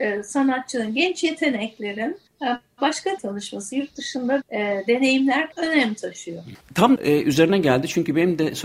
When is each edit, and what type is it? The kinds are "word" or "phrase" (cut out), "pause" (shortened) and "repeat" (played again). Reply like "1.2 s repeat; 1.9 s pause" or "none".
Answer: 3.2 s word; 4.4 s word; 5.5 s word; 7.0 s word